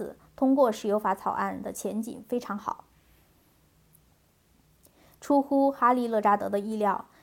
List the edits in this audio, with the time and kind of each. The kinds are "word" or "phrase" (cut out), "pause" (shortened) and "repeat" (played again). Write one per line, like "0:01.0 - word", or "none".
none

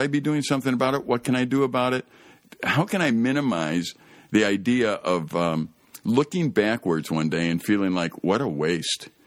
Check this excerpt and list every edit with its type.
none

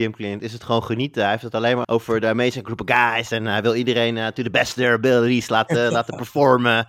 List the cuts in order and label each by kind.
0:01.8 - word

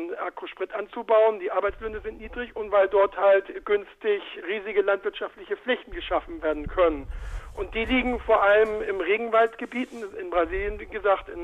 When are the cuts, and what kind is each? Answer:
0:04.4 - word

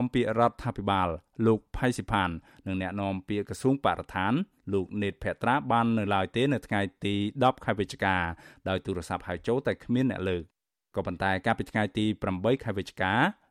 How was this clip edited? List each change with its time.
none

